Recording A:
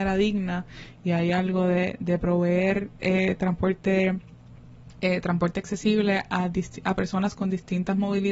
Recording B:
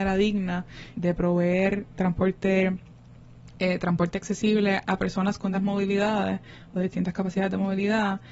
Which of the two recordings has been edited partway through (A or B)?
B